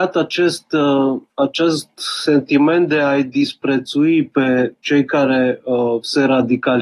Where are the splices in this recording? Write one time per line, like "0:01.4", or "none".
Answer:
0:01.3

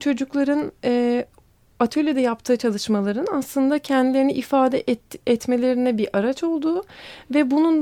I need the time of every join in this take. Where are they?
none

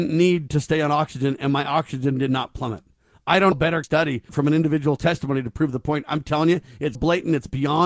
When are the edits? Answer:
0:03.5
0:03.8
0:04.3
0:06.9

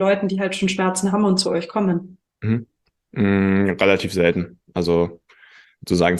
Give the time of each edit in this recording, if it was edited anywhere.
none

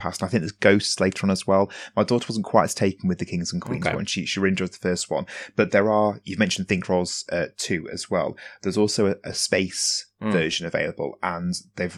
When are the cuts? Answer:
none

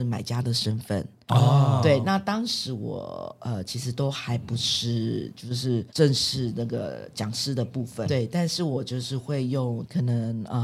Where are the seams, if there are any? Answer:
0:05.9
0:08.0

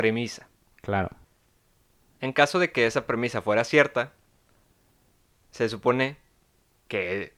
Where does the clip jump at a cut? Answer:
none

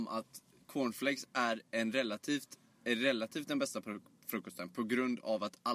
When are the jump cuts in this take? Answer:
none

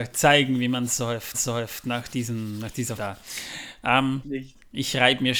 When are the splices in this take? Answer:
0:01.3
0:03.0
0:04.2

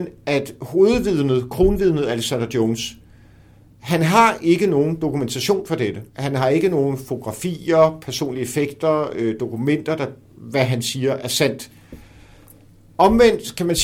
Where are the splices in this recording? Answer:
0:06.1
0:10.3

